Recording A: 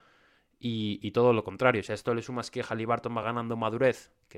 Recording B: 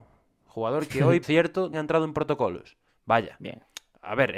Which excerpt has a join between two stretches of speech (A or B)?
B